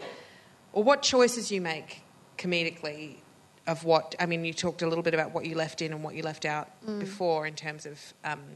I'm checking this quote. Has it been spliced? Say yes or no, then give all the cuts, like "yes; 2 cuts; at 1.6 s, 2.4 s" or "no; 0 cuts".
no; 0 cuts